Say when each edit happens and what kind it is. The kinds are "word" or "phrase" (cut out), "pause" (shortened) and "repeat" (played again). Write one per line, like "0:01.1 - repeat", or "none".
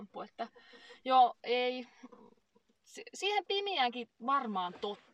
none